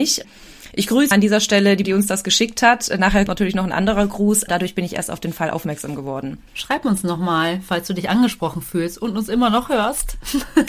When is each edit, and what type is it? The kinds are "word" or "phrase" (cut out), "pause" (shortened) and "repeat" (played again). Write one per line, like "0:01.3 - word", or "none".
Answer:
0:01.1 - phrase
0:01.8 - word
0:03.3 - word
0:04.5 - word
0:06.5 - pause